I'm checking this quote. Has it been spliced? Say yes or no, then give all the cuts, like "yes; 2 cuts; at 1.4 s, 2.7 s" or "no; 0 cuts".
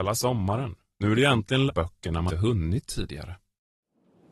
yes; 2 cuts; at 1.7 s, 2.3 s